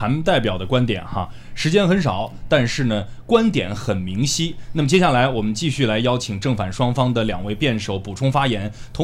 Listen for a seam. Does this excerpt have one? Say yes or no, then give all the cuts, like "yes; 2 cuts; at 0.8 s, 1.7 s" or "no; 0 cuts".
no; 0 cuts